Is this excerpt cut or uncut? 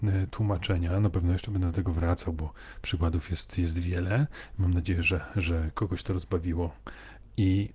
uncut